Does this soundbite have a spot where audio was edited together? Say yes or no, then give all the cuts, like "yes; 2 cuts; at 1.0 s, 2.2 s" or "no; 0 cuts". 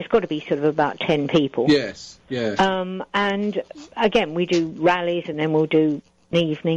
no; 0 cuts